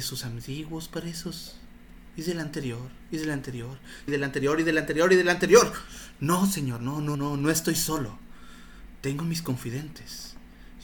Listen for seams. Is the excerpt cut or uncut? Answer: cut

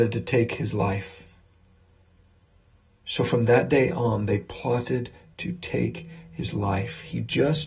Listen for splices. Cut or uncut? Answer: uncut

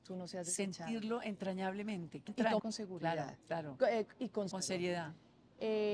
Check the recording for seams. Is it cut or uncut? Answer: cut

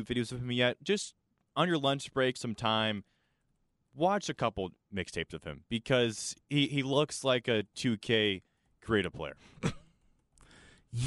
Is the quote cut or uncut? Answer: cut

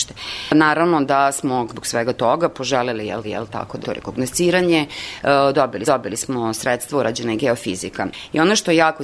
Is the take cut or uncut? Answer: cut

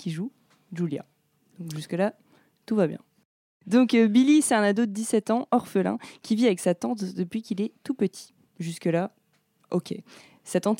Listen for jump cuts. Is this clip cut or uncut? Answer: uncut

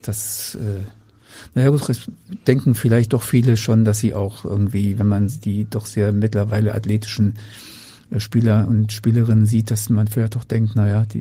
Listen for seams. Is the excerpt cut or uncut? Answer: uncut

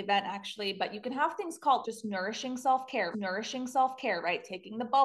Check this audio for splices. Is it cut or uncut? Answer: cut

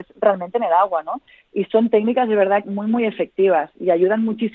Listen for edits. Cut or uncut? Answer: cut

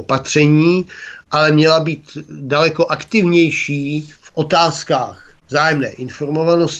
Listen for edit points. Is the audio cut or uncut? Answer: cut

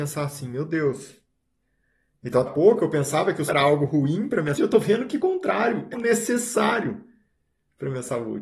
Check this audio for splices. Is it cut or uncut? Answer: cut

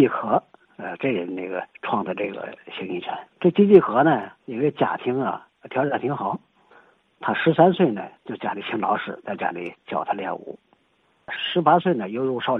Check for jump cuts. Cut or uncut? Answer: cut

